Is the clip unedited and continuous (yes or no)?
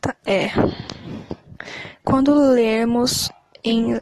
yes